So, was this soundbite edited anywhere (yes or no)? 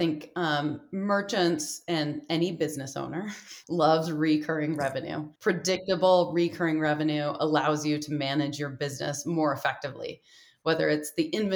yes